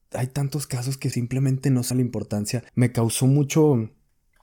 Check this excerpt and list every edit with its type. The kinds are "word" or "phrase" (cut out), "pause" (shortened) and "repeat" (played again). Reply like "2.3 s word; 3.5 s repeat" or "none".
1.1 s word; 1.9 s phrase; 2.7 s pause